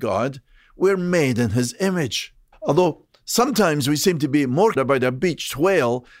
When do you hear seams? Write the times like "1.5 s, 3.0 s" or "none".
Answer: 2.5 s, 4.8 s